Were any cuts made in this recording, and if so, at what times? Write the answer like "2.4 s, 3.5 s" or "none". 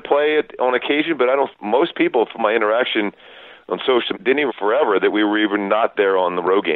1.5 s, 2.4 s, 4.1 s, 4.5 s